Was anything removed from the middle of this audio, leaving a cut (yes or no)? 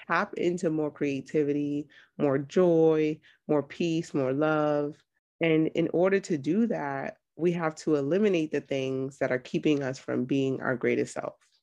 no